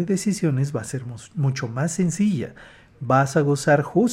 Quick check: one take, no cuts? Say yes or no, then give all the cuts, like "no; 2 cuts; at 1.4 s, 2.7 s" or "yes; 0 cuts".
yes; 0 cuts